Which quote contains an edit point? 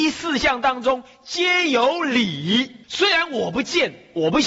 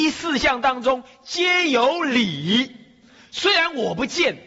first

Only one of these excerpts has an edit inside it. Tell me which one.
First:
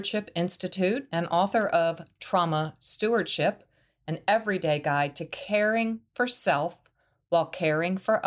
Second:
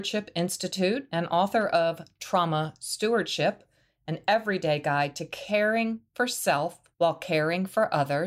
second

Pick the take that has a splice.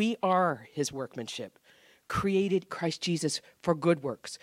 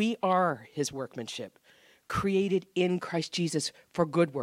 first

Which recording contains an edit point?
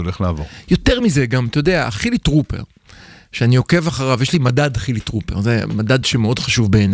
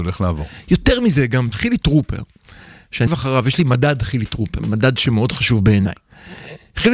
second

